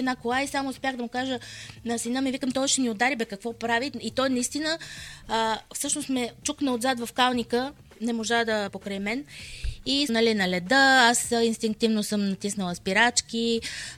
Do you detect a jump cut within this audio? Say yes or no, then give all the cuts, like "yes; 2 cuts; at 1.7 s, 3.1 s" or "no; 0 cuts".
yes; 2 cuts; at 8.7 s, 10.1 s